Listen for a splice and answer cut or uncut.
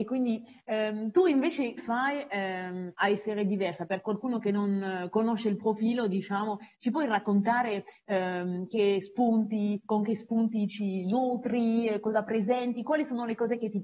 cut